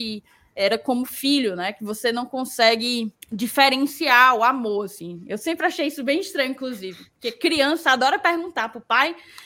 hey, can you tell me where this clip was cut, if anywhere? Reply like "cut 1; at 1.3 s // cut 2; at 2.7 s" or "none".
cut 1; at 3.2 s

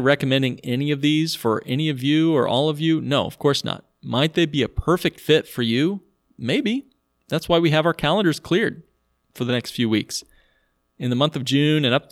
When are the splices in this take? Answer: none

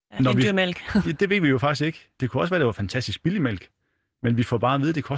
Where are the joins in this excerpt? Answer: none

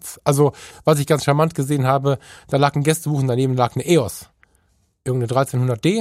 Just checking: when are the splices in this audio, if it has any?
none

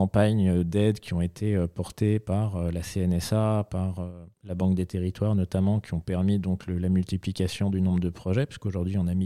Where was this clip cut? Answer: cut 1; at 4.3 s

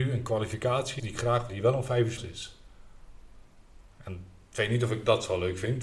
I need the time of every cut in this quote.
cut 1; at 1.0 s // cut 2; at 1.5 s // cut 3; at 2.2 s // cut 4; at 3.9 s

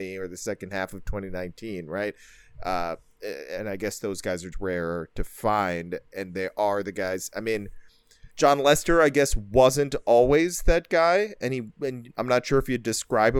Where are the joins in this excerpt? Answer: cut 1; at 4.5 s // cut 2; at 6.1 s // cut 3; at 8.3 s

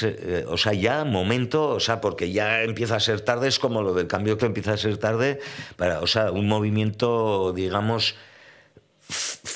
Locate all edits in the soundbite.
cut 1; at 4.4 s

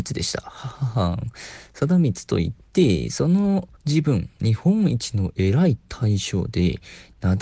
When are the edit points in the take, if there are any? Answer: cut 1; at 3.8 s

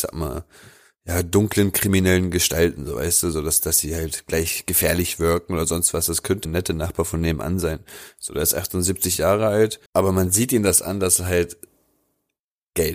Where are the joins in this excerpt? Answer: cut 1; at 6.4 s // cut 2; at 9.9 s

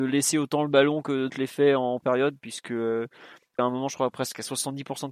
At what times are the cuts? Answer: cut 1; at 1.3 s // cut 2; at 2.0 s // cut 3; at 3.6 s

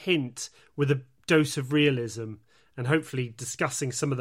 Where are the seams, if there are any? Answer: none

